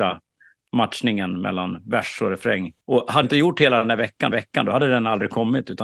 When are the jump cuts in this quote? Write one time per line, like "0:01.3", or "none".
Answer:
0:02.8
0:03.2
0:04.3